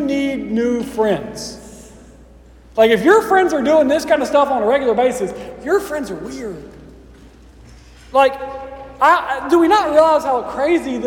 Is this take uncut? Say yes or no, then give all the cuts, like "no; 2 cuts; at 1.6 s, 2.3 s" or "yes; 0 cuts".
yes; 0 cuts